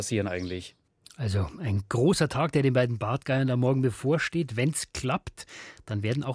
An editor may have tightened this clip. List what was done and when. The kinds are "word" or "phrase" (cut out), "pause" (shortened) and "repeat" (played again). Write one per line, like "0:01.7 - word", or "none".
none